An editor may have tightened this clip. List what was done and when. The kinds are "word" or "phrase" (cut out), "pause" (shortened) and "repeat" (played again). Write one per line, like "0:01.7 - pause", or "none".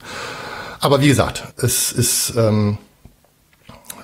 0:01.5 - word